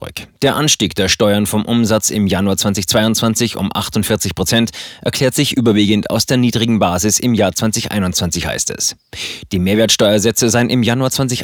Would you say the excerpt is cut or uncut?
uncut